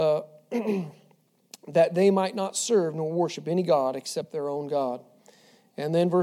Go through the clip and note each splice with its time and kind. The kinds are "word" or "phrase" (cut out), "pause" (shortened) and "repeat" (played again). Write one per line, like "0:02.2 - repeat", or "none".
none

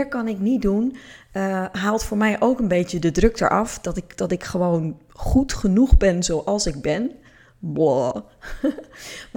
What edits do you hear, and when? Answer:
none

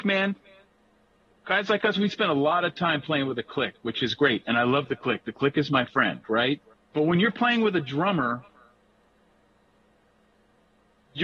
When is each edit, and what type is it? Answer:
0:06.7 - pause

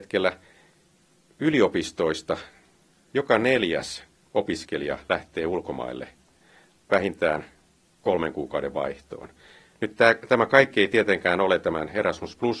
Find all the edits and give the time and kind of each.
none

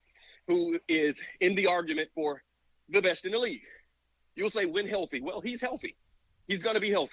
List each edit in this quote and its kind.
none

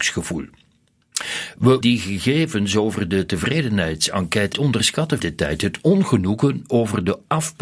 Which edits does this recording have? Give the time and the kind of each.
0:01.8 - word
0:04.5 - word
0:05.2 - word

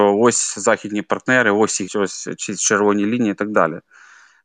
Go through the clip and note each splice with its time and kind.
0:01.9 - word

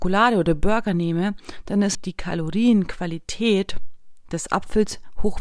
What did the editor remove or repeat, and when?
0:01.9 - word

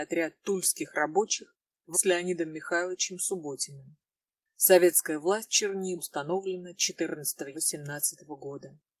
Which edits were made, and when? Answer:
0:01.9 - word
0:05.5 - word
0:06.0 - word
0:07.5 - word

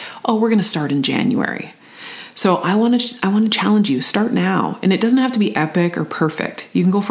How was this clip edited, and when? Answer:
none

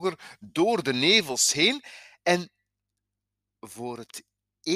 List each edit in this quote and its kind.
none

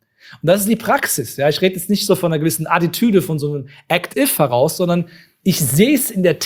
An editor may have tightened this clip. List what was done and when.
0:04.1 - word

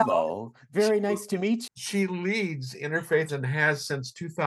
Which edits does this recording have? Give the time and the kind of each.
0:01.7 - word
0:03.3 - word

